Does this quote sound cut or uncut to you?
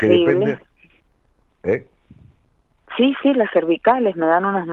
uncut